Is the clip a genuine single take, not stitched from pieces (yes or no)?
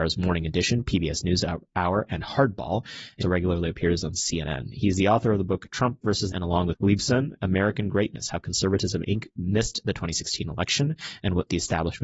no